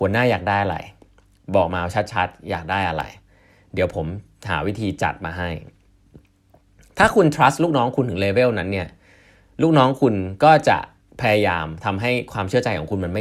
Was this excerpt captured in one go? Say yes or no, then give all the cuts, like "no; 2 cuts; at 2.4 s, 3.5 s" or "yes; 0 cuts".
no; 1 cut; at 11.0 s